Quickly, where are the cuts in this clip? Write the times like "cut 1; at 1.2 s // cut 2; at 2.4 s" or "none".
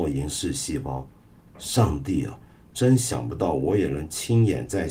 none

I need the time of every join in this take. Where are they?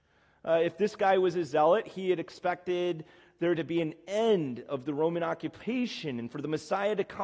none

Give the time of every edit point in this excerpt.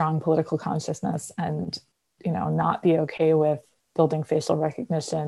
none

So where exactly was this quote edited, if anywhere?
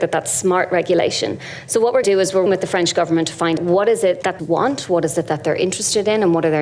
cut 1; at 2.0 s // cut 2; at 2.5 s // cut 3; at 3.6 s // cut 4; at 4.4 s

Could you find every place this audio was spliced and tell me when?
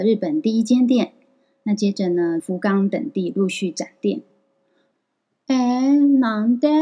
cut 1; at 2.4 s

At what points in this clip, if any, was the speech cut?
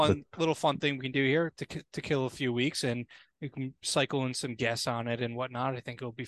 none

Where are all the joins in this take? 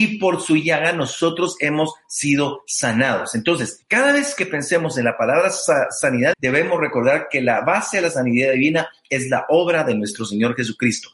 cut 1; at 3.8 s // cut 2; at 6.3 s

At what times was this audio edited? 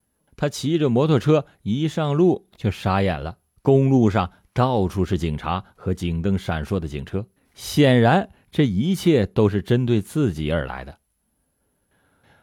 cut 1; at 3.6 s // cut 2; at 7.4 s

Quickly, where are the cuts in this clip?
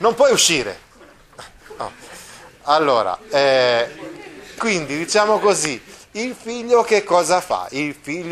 cut 1; at 4.6 s

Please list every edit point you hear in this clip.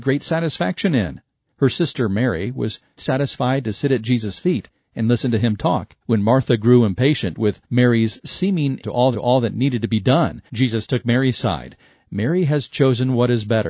cut 1; at 3.0 s // cut 2; at 6.0 s // cut 3; at 7.6 s // cut 4; at 8.8 s // cut 5; at 9.1 s // cut 6; at 10.5 s

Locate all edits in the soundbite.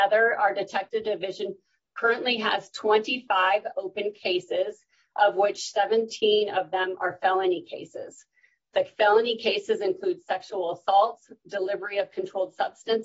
none

